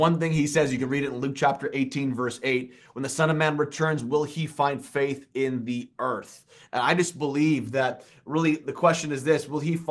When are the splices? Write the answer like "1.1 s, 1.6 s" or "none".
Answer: none

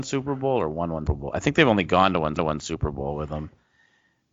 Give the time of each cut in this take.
1.1 s, 2.4 s

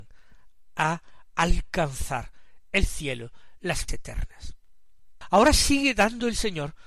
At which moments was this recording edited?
3.9 s

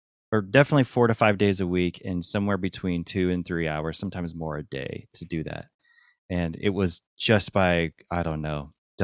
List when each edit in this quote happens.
none

